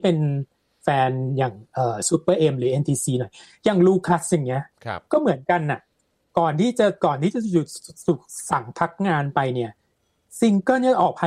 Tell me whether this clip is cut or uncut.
cut